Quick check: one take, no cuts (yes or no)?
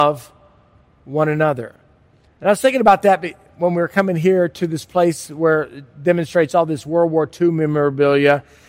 yes